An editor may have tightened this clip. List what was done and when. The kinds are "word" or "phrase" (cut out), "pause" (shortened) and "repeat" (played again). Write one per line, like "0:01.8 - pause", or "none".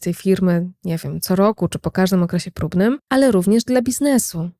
0:03.0 - pause